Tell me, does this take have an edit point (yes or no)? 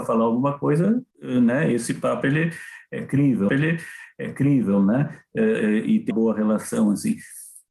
yes